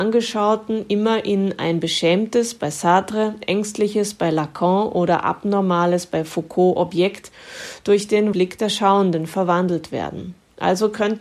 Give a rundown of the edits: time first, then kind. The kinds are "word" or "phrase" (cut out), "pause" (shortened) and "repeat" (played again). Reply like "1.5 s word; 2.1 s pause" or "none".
8.3 s word